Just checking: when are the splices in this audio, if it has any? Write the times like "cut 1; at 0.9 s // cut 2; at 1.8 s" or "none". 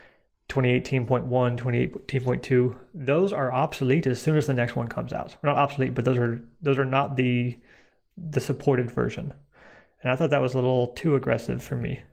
none